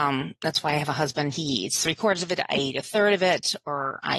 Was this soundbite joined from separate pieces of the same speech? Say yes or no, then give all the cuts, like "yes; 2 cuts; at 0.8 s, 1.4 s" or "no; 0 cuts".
no; 0 cuts